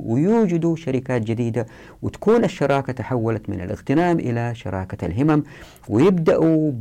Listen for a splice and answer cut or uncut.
uncut